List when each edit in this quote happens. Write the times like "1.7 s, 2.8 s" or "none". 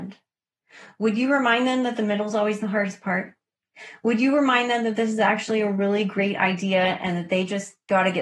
none